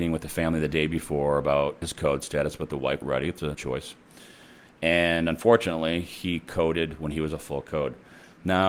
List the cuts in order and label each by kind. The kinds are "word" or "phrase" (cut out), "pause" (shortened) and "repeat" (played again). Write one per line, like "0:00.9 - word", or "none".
0:01.8 - word
0:03.0 - word
0:03.5 - word